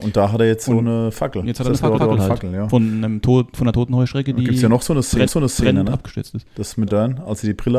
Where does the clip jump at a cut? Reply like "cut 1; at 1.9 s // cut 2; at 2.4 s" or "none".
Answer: cut 1; at 2.0 s // cut 2; at 5.3 s // cut 3; at 6.9 s

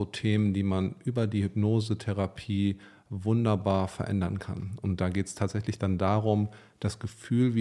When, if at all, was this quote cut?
none

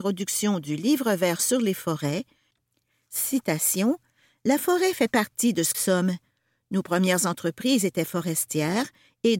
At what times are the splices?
cut 1; at 5.7 s

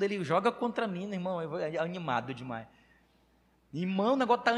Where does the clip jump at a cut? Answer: none

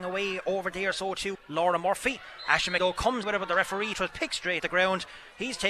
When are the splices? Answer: cut 1; at 1.3 s // cut 2; at 2.8 s // cut 3; at 3.2 s // cut 4; at 3.9 s // cut 5; at 4.6 s

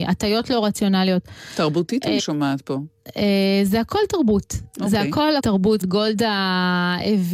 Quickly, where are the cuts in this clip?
cut 1; at 2.2 s // cut 2; at 5.4 s // cut 3; at 5.8 s

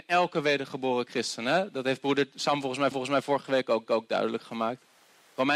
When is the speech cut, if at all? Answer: cut 1; at 2.9 s // cut 2; at 3.9 s

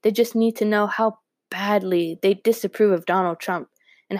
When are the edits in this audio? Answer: none

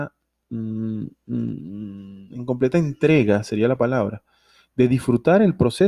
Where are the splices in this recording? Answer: none

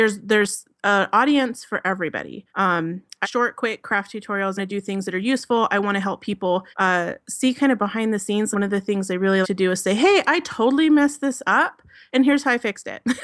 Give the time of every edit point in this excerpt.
cut 1; at 2.5 s // cut 2; at 3.2 s // cut 3; at 4.6 s // cut 4; at 6.7 s // cut 5; at 8.5 s // cut 6; at 9.4 s

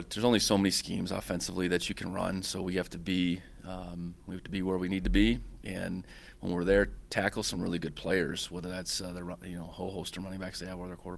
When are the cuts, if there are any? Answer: none

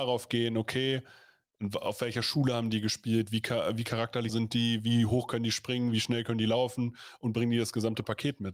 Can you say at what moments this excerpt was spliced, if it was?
cut 1; at 4.3 s

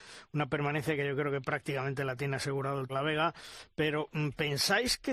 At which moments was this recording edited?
cut 1; at 2.9 s

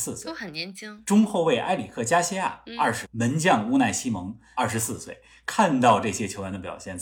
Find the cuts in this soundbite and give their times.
cut 1; at 3.0 s

